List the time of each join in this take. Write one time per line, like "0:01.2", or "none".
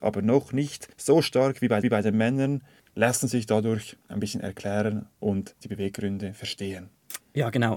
0:00.9
0:01.8
0:02.8
0:04.1